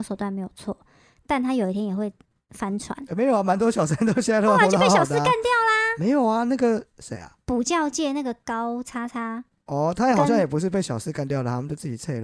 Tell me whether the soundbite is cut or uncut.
uncut